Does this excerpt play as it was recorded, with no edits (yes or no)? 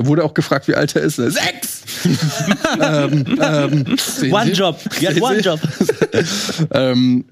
no